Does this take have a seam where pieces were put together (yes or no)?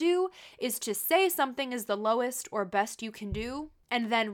no